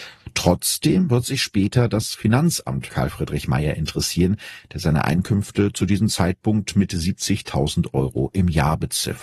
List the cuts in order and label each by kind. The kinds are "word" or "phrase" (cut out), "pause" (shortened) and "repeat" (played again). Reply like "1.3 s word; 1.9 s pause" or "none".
2.9 s word